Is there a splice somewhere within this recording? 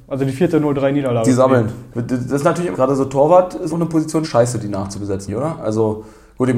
yes; 4 cuts; at 2.7 s, 3.7 s, 4.2 s, 5.3 s

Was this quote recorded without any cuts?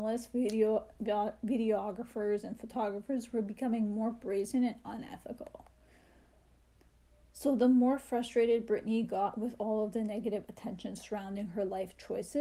yes; 0 cuts

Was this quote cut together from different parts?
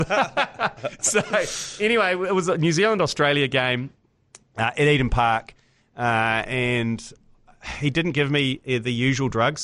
no; 0 cuts

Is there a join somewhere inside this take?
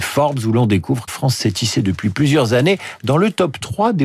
yes; 1 cut; at 1.1 s

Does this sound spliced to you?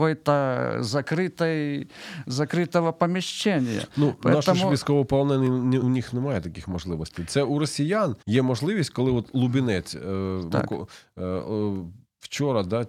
yes; 2 cuts; at 5.8 s, 8.2 s

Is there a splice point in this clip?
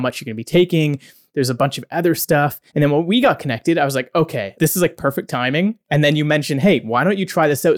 yes; 3 cuts; at 2.7 s, 4.6 s, 5.8 s

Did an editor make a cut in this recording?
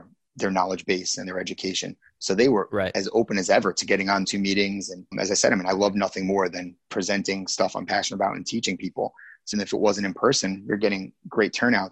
yes; 3 cuts; at 4.2 s, 5.1 s, 9.5 s

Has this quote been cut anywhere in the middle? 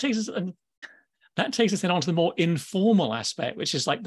no; 0 cuts

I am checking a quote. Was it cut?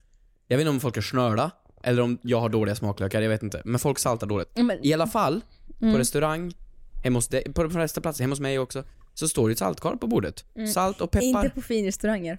no; 0 cuts

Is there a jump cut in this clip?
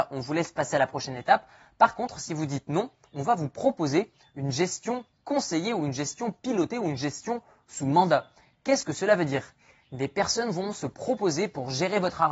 no; 0 cuts

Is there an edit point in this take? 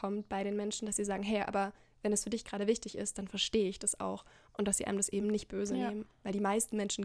no; 0 cuts

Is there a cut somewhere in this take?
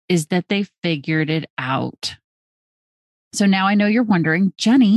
no; 0 cuts

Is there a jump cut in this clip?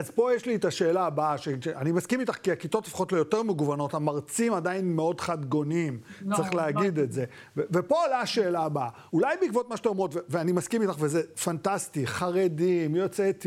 yes; 1 cut; at 9.1 s

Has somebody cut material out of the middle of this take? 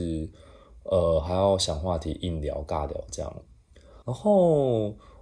yes; 1 cut; at 4.0 s

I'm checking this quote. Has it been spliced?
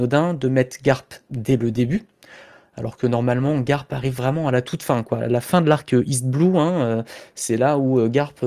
no; 0 cuts

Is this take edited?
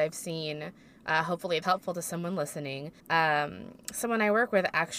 yes; 2 cuts; at 1.6 s, 3.0 s

